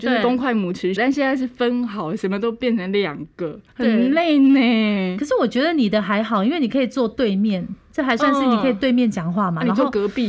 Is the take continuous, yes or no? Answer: no